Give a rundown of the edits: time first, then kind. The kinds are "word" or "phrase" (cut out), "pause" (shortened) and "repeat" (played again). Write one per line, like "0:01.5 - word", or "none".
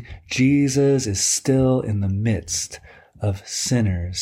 none